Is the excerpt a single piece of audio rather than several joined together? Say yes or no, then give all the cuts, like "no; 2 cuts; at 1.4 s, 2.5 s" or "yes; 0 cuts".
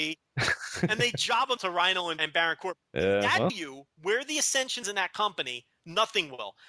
no; 5 cuts; at 1.6 s, 2.2 s, 3.5 s, 3.9 s, 4.8 s